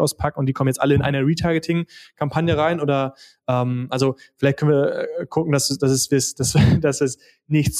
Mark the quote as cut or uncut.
uncut